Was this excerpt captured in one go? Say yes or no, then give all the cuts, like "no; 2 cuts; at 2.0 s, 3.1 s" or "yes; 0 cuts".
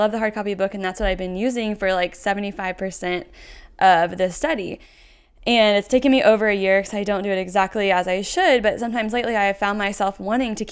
yes; 0 cuts